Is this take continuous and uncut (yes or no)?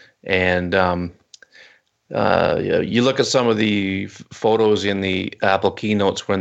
yes